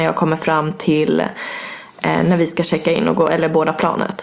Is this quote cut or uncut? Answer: uncut